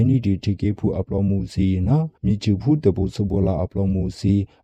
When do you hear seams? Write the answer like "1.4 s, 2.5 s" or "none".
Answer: 2.2 s